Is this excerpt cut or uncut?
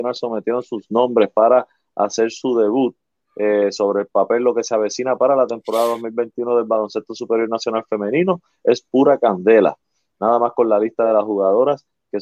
uncut